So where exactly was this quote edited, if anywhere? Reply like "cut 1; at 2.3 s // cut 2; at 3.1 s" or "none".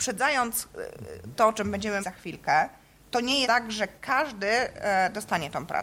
cut 1; at 1.4 s // cut 2; at 2.0 s // cut 3; at 3.4 s